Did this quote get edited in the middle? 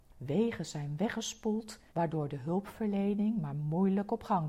yes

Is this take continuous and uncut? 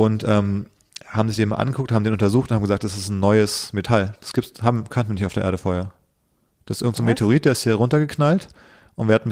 yes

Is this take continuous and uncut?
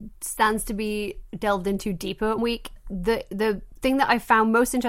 no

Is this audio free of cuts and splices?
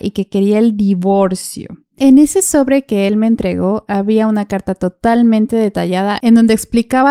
yes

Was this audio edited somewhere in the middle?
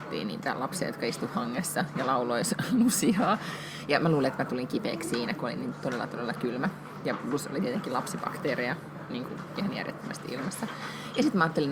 no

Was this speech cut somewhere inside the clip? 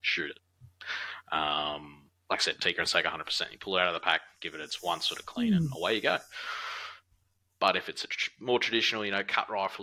no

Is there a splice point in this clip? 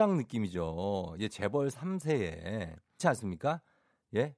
yes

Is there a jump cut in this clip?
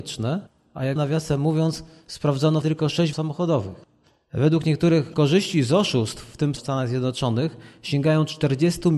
yes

